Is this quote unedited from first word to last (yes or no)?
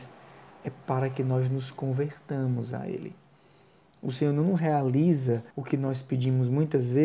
no